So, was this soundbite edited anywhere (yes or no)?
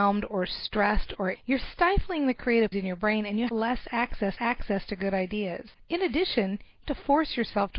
yes